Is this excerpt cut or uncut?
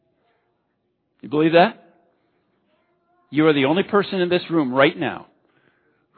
uncut